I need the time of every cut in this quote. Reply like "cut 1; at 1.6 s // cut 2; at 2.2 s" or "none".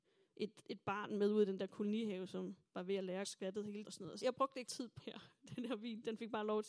cut 1; at 2.7 s // cut 2; at 3.2 s // cut 3; at 3.8 s // cut 4; at 4.2 s // cut 5; at 4.7 s // cut 6; at 5.0 s